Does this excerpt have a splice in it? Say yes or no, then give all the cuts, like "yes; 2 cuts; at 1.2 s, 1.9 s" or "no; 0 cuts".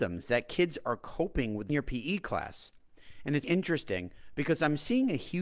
yes; 2 cuts; at 1.7 s, 3.4 s